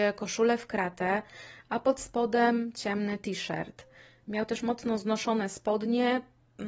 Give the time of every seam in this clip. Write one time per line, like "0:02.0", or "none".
none